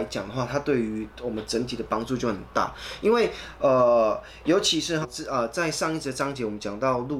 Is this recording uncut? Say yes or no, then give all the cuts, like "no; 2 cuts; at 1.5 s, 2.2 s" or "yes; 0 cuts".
no; 1 cut; at 5.0 s